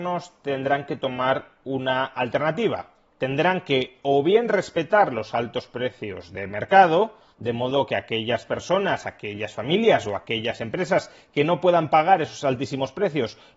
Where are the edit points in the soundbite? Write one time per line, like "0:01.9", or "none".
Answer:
none